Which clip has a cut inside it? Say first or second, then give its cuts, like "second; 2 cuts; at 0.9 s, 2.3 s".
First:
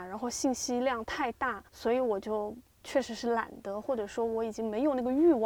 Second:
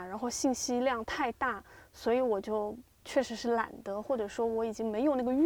first; 1 cut; at 1.7 s